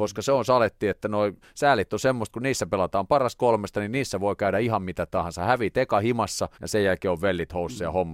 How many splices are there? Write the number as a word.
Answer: two